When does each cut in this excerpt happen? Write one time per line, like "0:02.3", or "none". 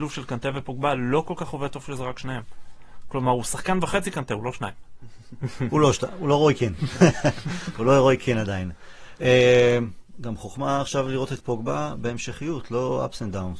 none